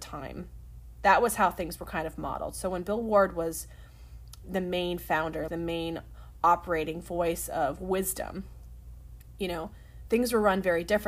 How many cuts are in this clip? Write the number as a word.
two